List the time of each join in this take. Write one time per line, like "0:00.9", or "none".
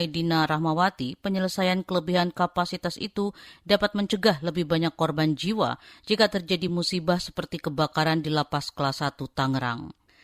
none